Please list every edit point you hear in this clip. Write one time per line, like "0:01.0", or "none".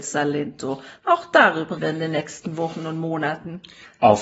0:01.8